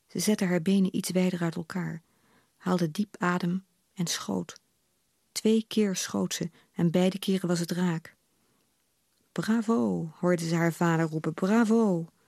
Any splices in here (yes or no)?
no